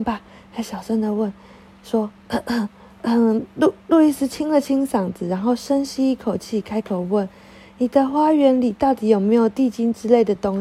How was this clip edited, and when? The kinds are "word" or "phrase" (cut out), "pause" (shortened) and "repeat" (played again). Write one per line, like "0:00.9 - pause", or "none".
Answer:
0:02.2 - pause